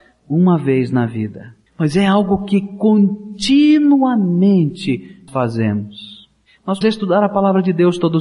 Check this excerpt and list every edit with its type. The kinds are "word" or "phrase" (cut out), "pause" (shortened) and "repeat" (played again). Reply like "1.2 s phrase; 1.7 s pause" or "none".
1.7 s pause; 5.3 s word; 6.8 s word

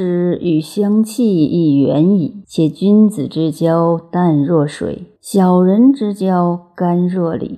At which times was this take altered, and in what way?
2.4 s pause; 5.2 s pause

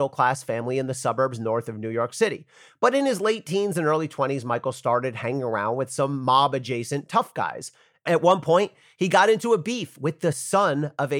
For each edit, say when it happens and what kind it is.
none

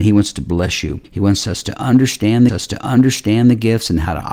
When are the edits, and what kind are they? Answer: 2.5 s repeat

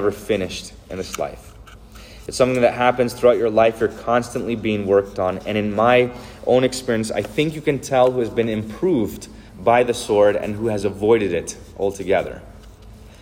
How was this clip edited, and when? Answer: 9.5 s pause

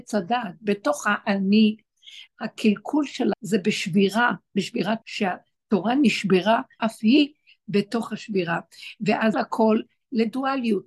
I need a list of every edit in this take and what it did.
2.3 s word; 3.3 s word; 5.0 s word; 6.8 s word; 9.3 s word

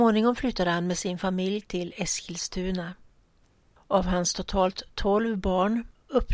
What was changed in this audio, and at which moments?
none

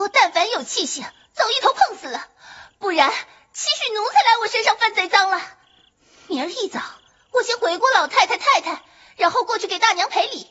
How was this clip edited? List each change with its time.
none

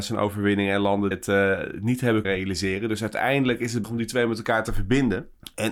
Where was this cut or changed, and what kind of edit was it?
1.1 s word; 2.2 s word; 3.8 s phrase

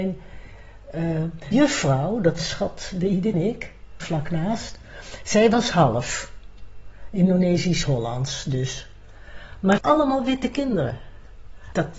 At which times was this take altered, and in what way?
1.5 s word; 2.4 s phrase; 3.3 s word; 4.0 s word; 9.8 s word

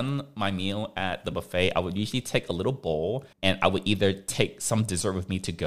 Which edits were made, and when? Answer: 3.3 s pause

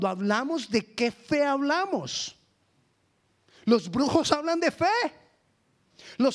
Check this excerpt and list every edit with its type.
none

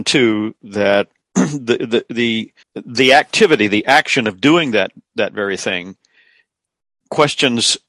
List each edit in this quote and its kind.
2.6 s pause

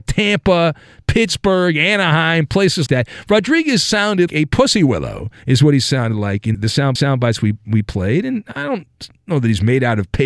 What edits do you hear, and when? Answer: 2.9 s word; 4.3 s word; 5.4 s pause; 6.5 s word; 7.0 s repeat

